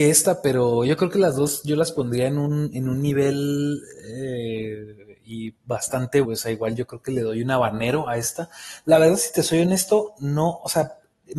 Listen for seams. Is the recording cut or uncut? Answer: cut